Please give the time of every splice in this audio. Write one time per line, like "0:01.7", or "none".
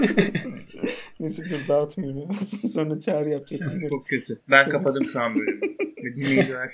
none